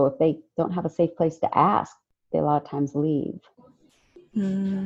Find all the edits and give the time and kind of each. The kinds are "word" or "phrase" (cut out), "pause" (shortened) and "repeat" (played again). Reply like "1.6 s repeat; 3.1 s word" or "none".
none